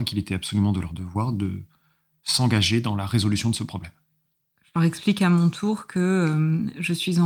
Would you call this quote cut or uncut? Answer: uncut